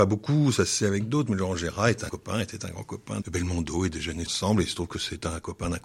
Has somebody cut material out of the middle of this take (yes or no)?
yes